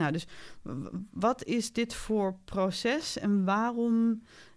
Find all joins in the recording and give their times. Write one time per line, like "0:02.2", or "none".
none